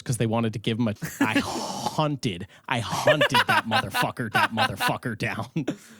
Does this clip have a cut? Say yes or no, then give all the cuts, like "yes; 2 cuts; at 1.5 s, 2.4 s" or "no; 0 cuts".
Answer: yes; 2 cuts; at 1.0 s, 4.3 s